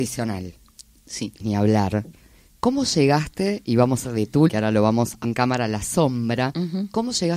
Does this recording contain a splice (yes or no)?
yes